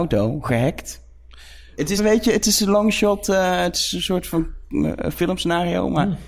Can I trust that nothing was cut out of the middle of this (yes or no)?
no